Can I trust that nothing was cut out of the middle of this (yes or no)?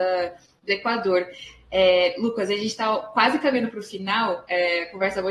yes